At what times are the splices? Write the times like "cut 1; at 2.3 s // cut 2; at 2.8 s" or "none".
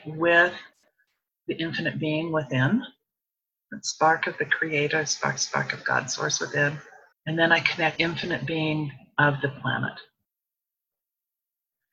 cut 1; at 3.4 s // cut 2; at 5.4 s // cut 3; at 7.1 s // cut 4; at 8.0 s